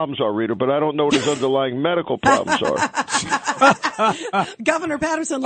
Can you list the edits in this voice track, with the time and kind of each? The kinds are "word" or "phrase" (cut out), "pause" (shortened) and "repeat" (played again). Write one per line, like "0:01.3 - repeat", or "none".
none